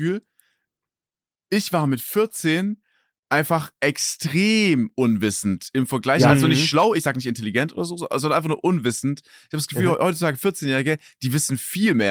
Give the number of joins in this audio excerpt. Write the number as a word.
zero